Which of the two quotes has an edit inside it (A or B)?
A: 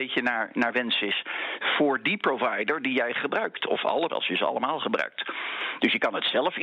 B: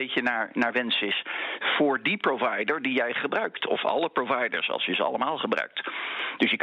A